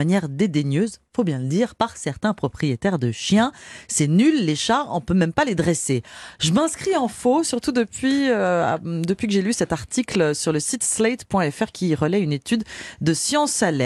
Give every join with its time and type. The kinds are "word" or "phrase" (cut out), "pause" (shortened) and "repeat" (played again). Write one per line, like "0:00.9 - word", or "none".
none